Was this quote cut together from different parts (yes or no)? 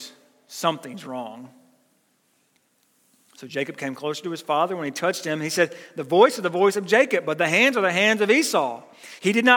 no